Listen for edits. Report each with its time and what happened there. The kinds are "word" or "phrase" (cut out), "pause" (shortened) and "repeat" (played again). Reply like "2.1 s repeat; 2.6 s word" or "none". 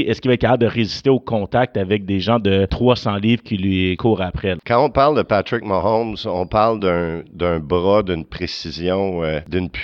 none